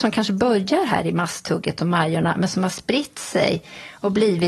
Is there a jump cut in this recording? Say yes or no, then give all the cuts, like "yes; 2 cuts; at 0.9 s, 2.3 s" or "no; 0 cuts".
no; 0 cuts